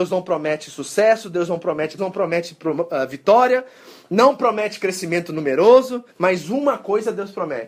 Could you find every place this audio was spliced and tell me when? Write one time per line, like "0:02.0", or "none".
0:02.0
0:06.1